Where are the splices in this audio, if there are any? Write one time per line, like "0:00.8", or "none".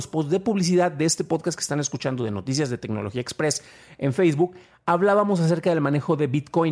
none